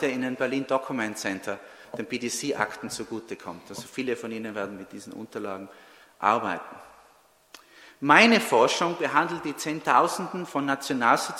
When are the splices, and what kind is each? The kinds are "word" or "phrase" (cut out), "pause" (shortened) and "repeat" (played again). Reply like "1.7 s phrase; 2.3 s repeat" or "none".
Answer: none